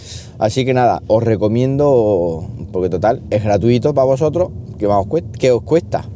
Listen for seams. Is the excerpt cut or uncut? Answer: cut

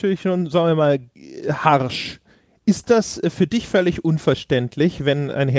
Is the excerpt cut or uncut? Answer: uncut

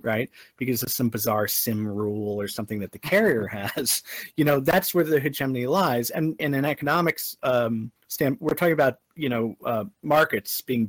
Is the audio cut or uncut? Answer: cut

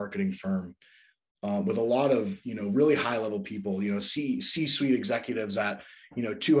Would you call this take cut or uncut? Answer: uncut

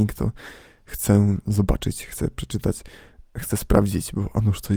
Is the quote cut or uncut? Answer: uncut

